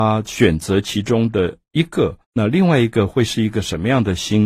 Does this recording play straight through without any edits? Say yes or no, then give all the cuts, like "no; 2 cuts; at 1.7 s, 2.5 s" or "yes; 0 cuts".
no; 1 cut; at 2.2 s